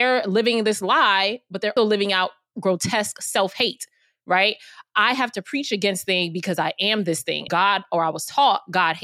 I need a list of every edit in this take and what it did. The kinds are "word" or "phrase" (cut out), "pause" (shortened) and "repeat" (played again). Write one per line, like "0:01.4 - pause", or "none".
0:01.8 - word
0:06.0 - word
0:07.5 - word